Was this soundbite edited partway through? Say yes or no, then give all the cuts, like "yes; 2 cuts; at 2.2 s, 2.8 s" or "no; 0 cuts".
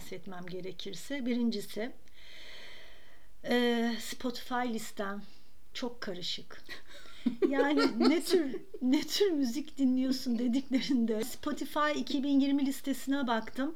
no; 0 cuts